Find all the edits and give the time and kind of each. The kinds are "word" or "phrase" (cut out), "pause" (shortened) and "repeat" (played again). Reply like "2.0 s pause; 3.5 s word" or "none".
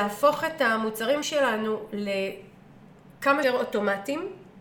1.2 s word; 3.4 s word